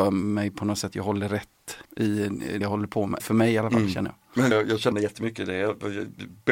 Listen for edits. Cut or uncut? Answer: cut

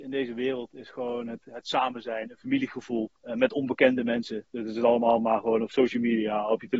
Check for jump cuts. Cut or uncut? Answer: cut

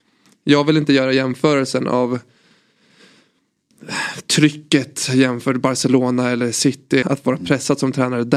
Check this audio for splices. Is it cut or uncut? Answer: cut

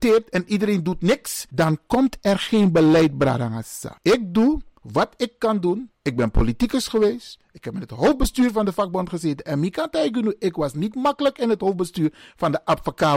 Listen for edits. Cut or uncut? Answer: uncut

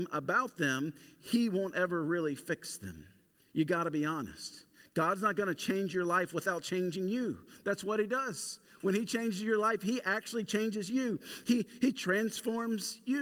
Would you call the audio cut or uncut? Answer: cut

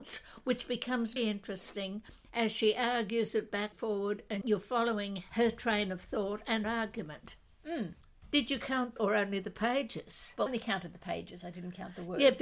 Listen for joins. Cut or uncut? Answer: cut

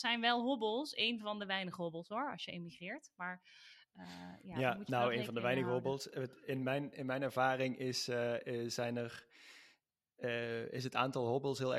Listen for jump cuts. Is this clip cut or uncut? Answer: uncut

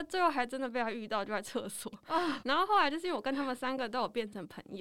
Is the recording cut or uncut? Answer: cut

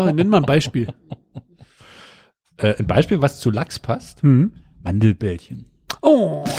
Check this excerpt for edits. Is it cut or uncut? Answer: uncut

